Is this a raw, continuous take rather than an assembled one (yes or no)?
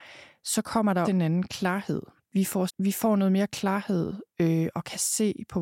no